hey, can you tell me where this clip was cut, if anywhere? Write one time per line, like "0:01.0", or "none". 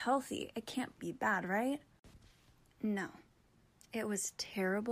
0:01.0